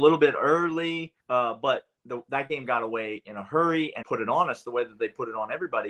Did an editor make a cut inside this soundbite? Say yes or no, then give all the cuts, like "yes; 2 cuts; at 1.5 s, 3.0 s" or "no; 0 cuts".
yes; 2 cuts; at 1.2 s, 4.0 s